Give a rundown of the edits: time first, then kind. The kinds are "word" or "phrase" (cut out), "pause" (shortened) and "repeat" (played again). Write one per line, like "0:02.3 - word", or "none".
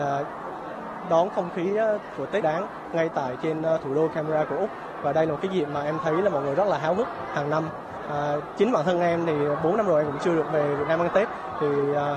0:02.4 - word